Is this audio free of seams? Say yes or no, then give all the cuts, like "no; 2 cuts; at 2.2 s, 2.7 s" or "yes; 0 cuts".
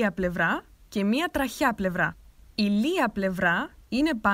yes; 0 cuts